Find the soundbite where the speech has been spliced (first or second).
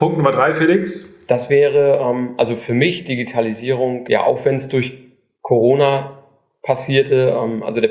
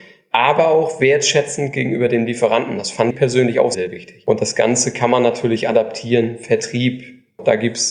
second